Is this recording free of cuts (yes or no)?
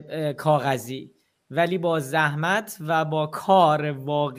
yes